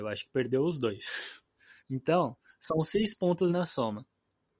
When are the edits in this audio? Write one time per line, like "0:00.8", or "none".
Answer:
0:01.8
0:03.5

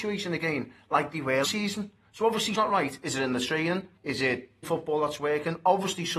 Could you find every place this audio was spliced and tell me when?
0:01.4
0:02.5
0:04.0
0:04.6

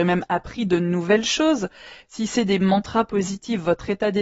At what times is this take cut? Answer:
none

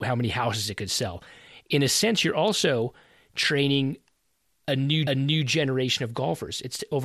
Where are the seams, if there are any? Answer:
0:05.1

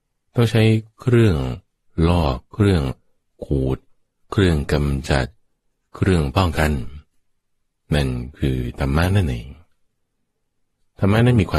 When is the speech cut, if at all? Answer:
none

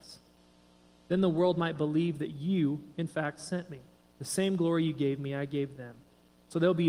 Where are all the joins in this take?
none

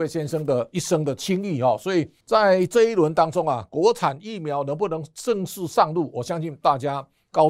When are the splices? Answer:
0:02.2

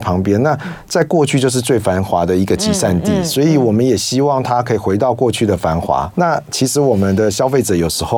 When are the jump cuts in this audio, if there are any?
0:06.1

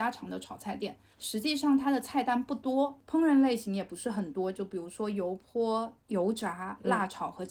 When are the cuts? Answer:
0:01.1

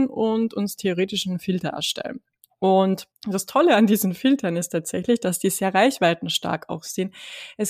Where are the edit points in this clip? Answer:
0:03.1

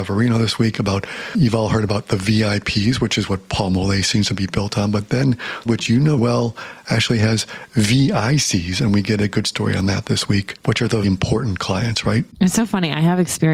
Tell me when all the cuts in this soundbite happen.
0:05.7
0:06.2
0:11.0

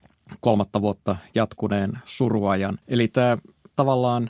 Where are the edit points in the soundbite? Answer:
0:02.8

